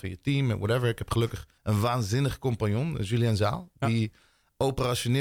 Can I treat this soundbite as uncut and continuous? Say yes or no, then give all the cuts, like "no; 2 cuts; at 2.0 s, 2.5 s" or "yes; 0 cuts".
no; 1 cut; at 1.6 s